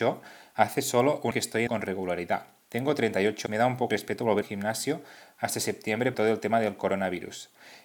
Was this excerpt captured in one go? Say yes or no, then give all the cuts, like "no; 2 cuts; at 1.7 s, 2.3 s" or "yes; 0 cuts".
no; 6 cuts; at 1.3 s, 1.7 s, 3.5 s, 3.9 s, 4.4 s, 6.1 s